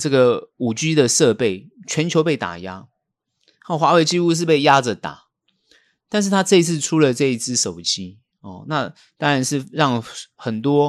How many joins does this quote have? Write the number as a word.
zero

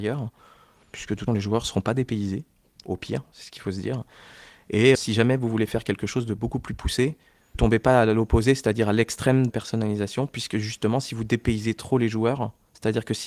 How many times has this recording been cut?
four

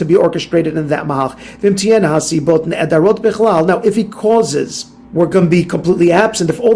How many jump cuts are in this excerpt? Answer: one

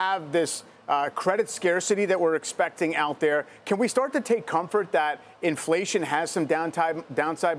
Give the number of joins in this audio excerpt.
zero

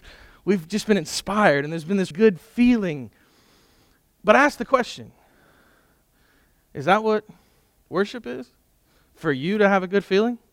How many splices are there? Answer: one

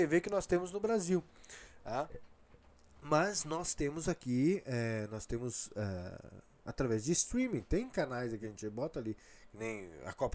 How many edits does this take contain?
zero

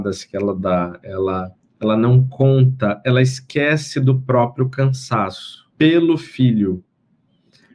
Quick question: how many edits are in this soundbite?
two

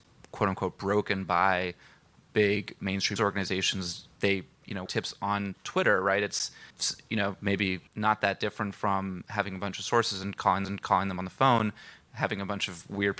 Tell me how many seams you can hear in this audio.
six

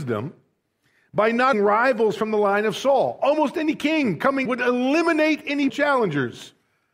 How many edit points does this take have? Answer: three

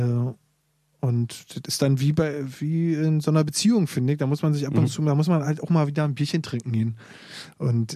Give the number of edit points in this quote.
zero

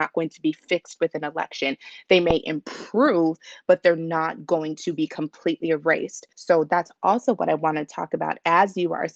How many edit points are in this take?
one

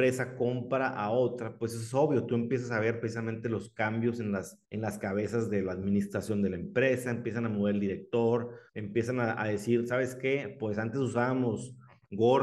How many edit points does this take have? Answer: two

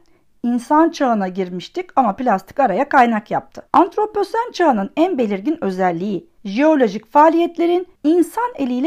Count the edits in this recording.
three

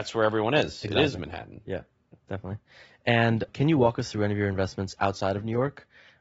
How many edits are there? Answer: one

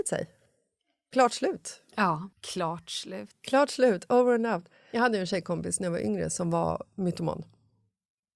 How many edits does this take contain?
one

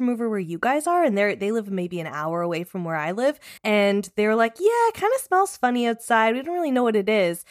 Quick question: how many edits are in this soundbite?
one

